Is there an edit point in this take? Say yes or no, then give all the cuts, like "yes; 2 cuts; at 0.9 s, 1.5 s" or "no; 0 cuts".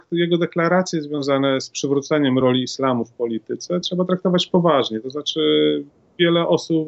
no; 0 cuts